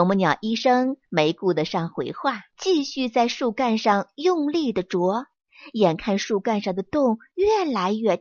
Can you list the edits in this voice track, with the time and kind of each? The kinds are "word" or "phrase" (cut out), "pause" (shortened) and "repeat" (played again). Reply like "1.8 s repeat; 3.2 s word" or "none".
2.5 s pause